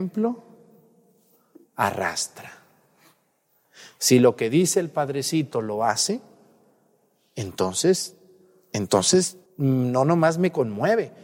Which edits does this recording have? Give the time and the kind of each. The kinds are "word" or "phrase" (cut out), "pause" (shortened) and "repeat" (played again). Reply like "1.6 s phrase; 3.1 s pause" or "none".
9.5 s pause